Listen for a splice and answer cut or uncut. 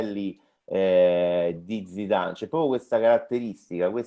uncut